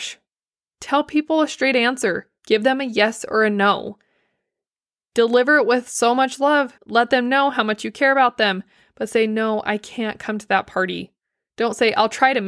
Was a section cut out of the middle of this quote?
yes; 1 cut; at 6.8 s

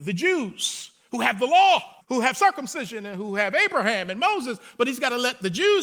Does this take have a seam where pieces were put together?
yes; 1 cut; at 2.0 s

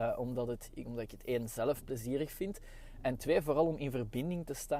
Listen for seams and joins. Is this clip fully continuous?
yes; 0 cuts

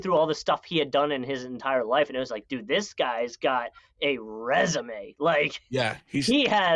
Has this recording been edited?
no; 0 cuts

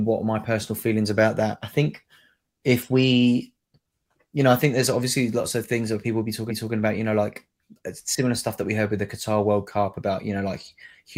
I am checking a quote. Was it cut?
yes; 1 cut; at 6.5 s

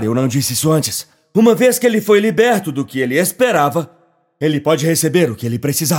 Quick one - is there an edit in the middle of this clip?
no; 0 cuts

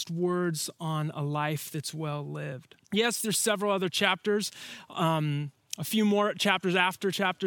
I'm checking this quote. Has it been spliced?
yes; 1 cut; at 2.8 s

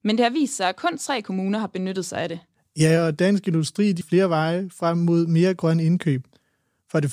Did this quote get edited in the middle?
yes; 1 cut; at 4.0 s

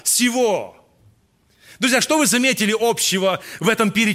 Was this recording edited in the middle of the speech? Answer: no; 0 cuts

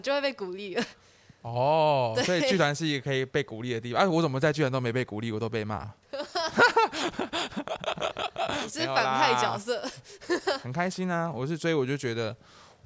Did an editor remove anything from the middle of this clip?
yes; 1 cut; at 6.0 s

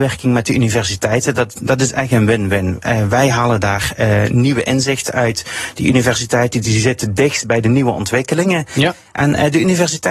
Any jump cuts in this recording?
no; 0 cuts

